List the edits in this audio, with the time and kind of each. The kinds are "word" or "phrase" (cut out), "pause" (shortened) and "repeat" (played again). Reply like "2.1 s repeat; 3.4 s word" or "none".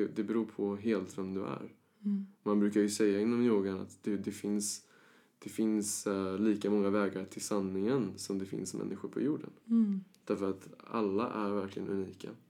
none

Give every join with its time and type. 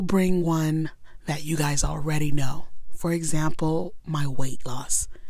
none

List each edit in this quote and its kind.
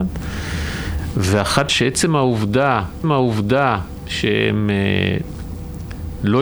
1.7 s phrase; 3.0 s repeat

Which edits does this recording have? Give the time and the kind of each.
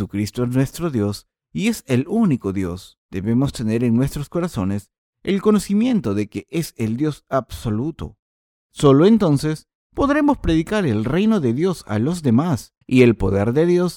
3.0 s pause; 12.8 s pause

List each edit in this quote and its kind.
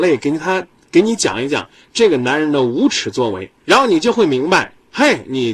3.6 s pause

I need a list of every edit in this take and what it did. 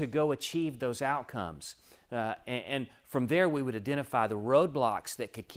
none

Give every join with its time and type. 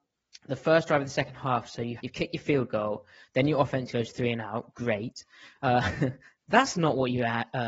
2.0 s word

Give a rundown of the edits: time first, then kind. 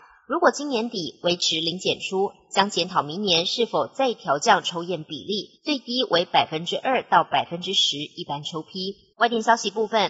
5.6 s pause; 9.1 s pause

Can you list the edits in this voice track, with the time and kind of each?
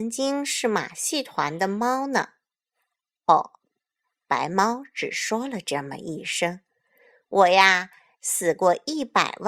none

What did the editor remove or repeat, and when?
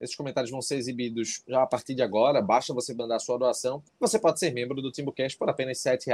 3.9 s pause

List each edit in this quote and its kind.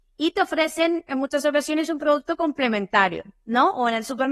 none

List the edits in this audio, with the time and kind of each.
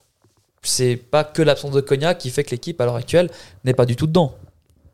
none

